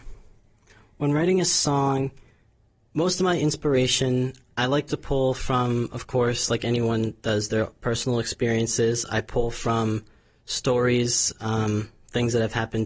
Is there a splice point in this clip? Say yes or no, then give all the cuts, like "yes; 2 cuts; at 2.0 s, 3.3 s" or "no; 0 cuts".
no; 0 cuts